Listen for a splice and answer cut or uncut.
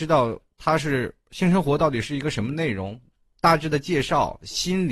uncut